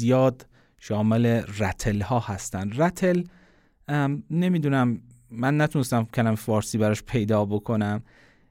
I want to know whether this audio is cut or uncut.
uncut